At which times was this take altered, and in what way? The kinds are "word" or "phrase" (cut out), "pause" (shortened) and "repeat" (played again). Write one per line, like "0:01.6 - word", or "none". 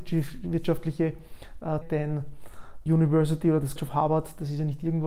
0:01.8 - word
0:02.9 - word
0:03.8 - word